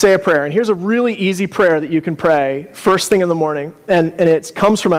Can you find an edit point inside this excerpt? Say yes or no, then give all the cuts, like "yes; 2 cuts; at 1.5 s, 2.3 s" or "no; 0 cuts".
no; 0 cuts